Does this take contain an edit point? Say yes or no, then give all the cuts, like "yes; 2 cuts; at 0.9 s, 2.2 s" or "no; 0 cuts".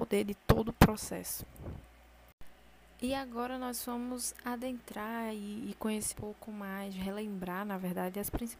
yes; 1 cut; at 6.1 s